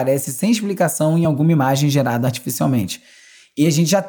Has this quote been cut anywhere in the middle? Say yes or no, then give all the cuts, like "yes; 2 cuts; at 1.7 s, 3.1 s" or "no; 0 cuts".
no; 0 cuts